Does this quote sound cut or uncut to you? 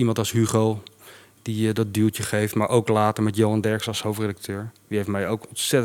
uncut